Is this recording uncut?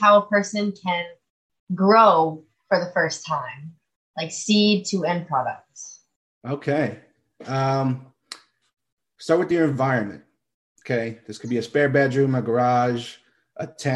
yes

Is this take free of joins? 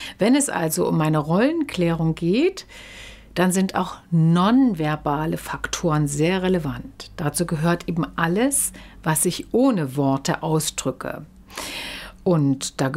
yes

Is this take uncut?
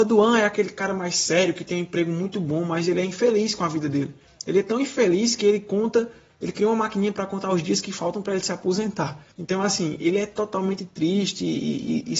yes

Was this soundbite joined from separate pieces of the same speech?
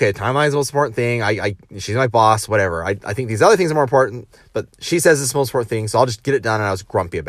no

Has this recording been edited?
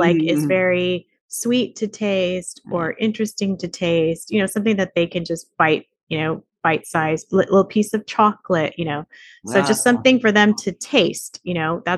no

